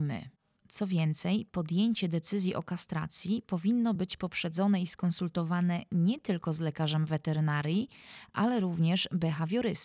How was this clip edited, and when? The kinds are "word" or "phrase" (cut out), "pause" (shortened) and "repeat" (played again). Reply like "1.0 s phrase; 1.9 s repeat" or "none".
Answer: none